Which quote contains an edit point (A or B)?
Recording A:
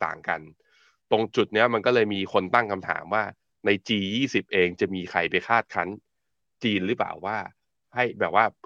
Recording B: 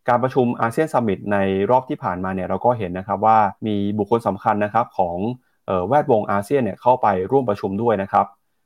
B